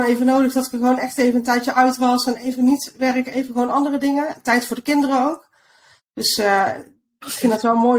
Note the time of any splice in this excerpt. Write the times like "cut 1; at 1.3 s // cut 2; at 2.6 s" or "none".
none